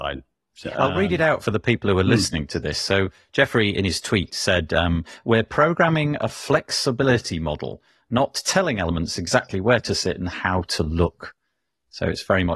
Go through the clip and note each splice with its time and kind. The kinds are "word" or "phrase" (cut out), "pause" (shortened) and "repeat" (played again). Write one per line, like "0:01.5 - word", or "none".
none